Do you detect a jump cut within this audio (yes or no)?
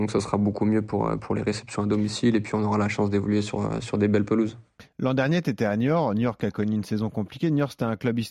no